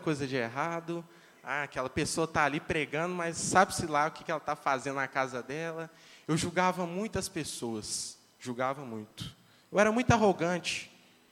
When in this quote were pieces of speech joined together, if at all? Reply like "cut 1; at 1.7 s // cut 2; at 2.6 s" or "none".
none